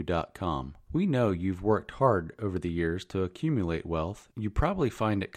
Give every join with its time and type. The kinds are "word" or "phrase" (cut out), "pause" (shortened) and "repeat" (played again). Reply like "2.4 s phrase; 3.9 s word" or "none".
none